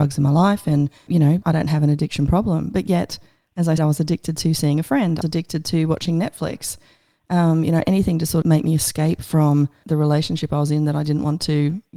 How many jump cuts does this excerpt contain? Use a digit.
6